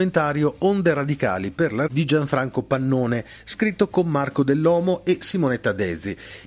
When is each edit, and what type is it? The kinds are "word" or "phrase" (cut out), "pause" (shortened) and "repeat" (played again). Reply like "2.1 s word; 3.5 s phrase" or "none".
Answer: 1.9 s word

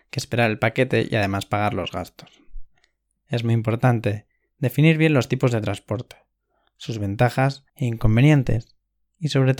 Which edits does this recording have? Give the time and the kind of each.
7.7 s pause

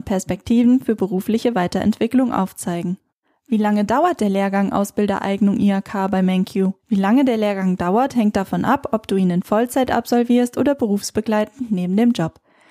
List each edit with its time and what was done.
3.2 s pause; 6.8 s pause

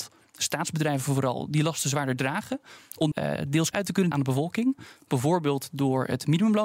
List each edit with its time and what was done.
3.1 s word; 3.7 s word; 4.1 s word

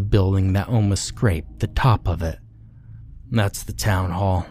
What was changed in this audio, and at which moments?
3.2 s pause

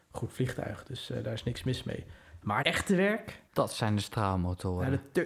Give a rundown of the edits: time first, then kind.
2.6 s word; 3.5 s pause

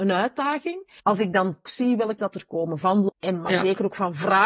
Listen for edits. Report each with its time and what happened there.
1.0 s pause; 1.7 s word; 2.2 s word; 3.1 s word

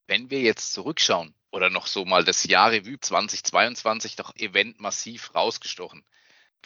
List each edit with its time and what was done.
1.4 s pause; 3.0 s phrase; 4.4 s word

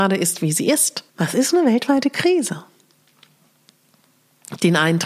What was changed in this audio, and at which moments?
1.1 s pause

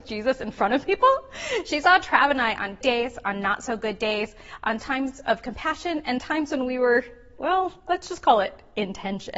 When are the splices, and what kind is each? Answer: 2.8 s word

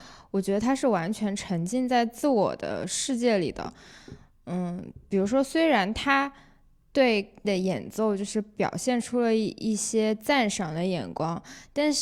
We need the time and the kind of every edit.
7.4 s word

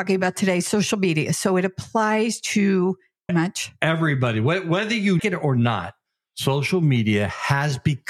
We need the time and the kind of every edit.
3.3 s phrase; 5.2 s word

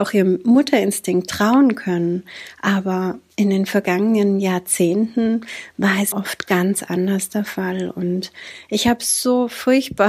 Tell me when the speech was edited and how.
6.1 s word

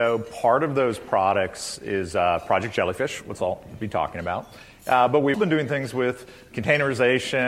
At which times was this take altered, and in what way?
5.3 s word

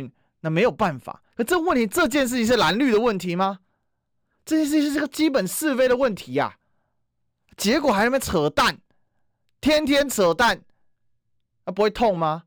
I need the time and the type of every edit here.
1.3 s pause

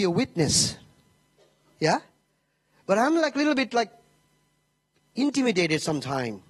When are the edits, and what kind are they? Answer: none

